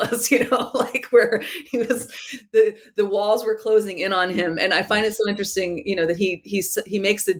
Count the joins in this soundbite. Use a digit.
0